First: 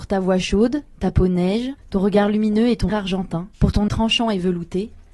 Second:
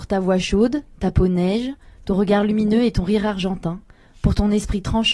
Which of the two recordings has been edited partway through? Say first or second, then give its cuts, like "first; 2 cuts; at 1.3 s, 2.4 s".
first; 4 cuts; at 1.8 s, 2.9 s, 3.5 s, 3.9 s